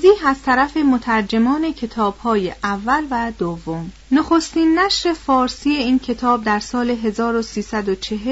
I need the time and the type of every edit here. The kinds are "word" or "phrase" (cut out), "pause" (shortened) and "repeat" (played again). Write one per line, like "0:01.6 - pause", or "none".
0:04.0 - pause